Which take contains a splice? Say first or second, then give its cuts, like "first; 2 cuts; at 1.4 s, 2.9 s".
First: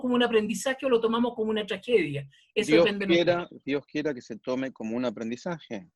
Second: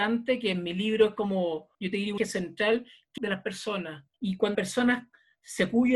second; 5 cuts; at 1.7 s, 2.2 s, 3.2 s, 4.1 s, 4.5 s